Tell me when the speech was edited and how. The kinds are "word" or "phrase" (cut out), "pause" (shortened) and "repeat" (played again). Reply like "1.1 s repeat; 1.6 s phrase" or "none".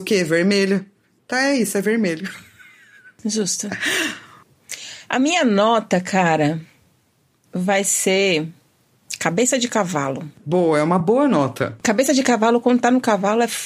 none